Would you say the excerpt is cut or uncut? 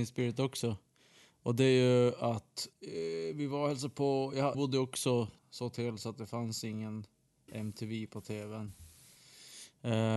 cut